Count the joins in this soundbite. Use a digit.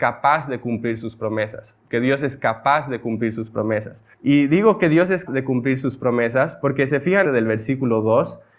5